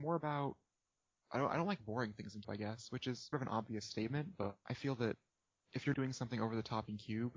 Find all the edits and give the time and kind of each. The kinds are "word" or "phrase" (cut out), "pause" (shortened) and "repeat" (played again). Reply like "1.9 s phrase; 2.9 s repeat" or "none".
2.4 s word; 3.3 s word; 5.9 s word